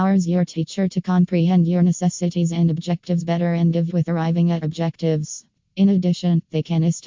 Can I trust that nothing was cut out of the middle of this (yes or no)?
no